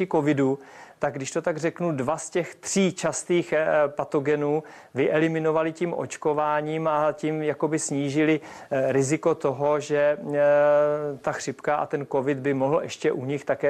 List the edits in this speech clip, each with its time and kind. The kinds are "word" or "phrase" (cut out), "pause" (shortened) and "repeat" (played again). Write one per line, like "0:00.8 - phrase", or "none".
none